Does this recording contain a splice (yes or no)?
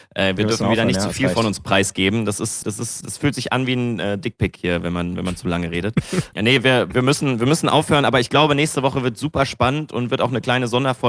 yes